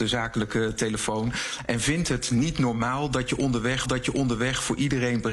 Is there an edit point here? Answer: yes; 1 cut; at 3.8 s

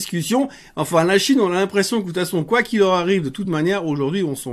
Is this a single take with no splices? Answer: yes; 0 cuts

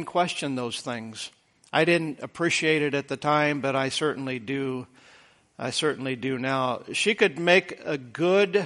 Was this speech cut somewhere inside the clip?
no; 0 cuts

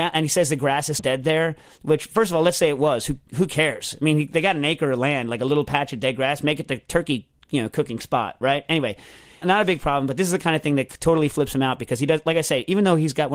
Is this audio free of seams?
no; 2 cuts; at 1.0 s, 9.4 s

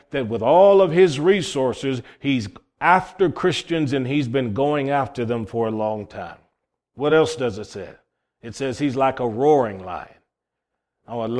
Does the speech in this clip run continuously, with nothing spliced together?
yes; 0 cuts

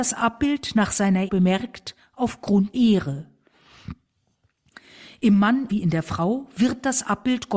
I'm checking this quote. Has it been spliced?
yes; 3 cuts; at 1.3 s, 2.7 s, 5.7 s

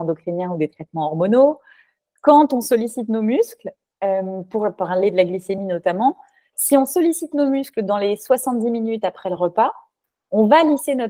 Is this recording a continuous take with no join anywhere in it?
yes; 0 cuts

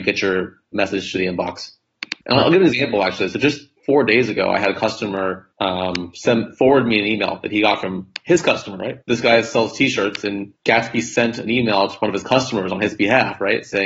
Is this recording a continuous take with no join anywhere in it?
no; 5 cuts; at 2.2 s, 3.8 s, 5.5 s, 9.0 s, 10.6 s

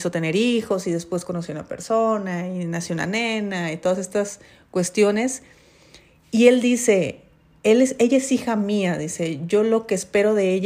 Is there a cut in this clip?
no; 0 cuts

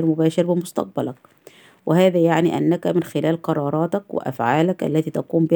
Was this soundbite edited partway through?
no; 0 cuts

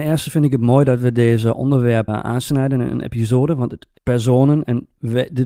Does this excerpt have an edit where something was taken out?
yes; 2 cuts; at 2.1 s, 4.0 s

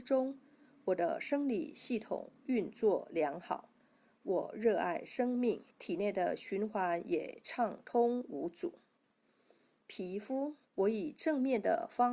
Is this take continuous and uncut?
no; 2 cuts; at 5.7 s, 10.6 s

